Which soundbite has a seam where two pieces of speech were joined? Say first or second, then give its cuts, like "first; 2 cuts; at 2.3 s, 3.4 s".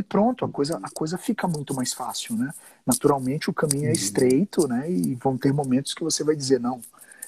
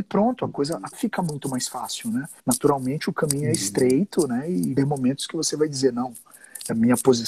second; 3 cuts; at 0.9 s, 2.4 s, 4.8 s